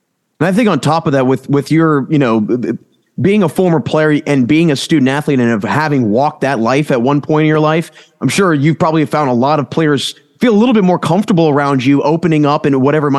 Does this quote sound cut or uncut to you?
uncut